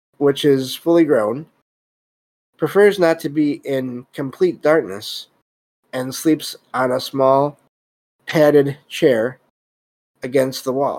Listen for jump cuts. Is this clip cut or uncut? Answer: uncut